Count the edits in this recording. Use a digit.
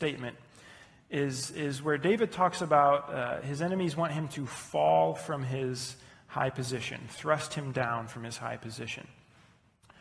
0